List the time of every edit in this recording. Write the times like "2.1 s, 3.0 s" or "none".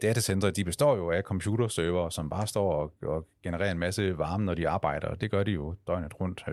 none